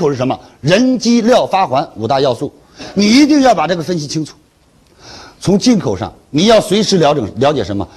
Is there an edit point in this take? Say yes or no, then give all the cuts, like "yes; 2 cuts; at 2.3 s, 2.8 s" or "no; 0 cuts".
no; 0 cuts